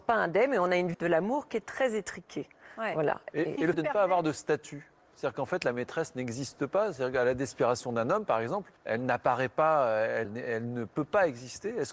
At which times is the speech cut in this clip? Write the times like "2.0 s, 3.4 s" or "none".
0.9 s, 3.7 s, 8.8 s, 10.2 s